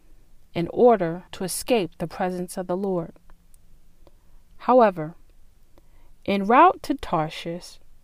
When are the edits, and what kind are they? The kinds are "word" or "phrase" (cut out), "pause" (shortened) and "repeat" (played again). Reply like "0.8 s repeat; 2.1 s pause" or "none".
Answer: 1.3 s pause

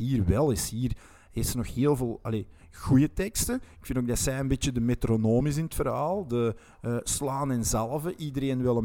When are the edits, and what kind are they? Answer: none

